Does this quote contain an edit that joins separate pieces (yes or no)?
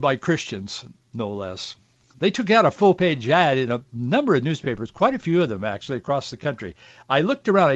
no